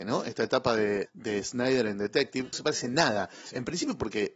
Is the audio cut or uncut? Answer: cut